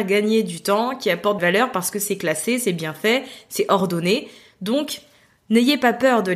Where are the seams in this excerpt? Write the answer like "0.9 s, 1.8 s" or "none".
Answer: 1.4 s